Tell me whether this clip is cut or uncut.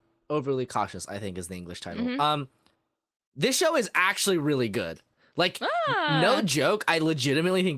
uncut